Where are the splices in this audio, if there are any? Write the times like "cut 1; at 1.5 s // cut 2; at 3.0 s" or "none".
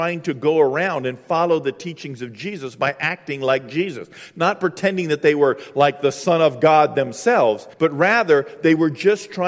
cut 1; at 7.7 s

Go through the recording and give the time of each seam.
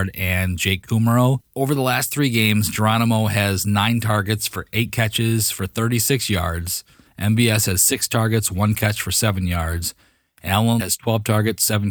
cut 1; at 10.8 s

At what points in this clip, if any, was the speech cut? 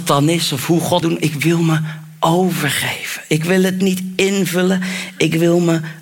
cut 1; at 1.0 s

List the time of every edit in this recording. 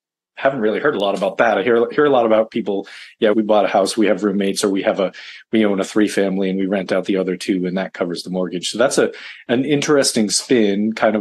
cut 1; at 3.3 s

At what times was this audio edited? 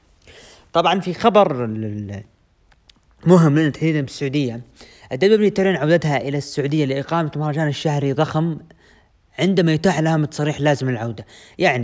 none

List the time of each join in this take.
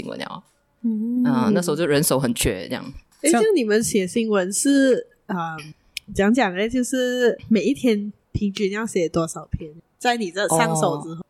none

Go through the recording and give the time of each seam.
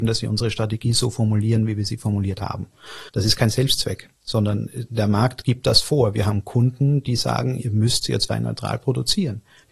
cut 1; at 3.1 s // cut 2; at 4.1 s

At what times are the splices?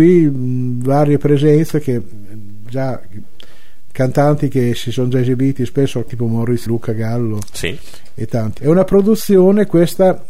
cut 1; at 6.1 s // cut 2; at 6.7 s // cut 3; at 8.6 s

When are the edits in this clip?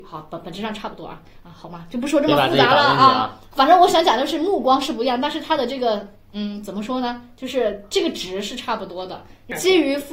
cut 1; at 3.5 s

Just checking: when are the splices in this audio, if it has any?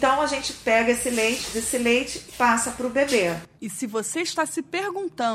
cut 1; at 1.5 s // cut 2; at 2.3 s // cut 3; at 3.6 s

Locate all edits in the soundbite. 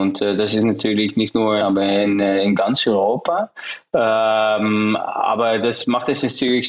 cut 1; at 1.6 s

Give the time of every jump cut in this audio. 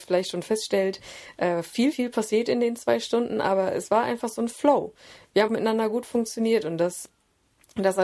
cut 1; at 1.9 s // cut 2; at 5.5 s

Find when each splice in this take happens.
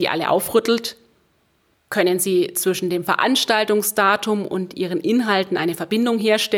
none

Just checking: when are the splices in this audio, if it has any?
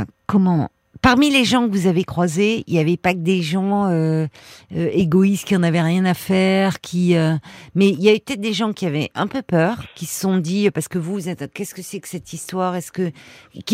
none

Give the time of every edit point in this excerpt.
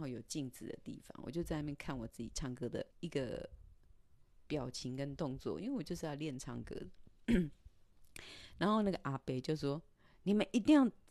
cut 1; at 2.9 s

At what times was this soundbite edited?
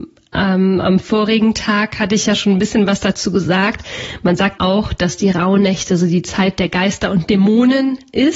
cut 1; at 4.6 s

